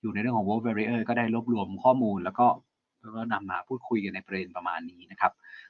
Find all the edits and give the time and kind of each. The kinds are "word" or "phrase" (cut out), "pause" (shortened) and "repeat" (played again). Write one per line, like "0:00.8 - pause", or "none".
none